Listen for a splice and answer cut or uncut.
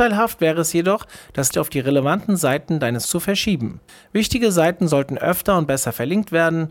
cut